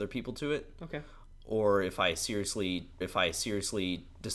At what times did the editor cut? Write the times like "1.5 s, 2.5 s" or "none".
3.0 s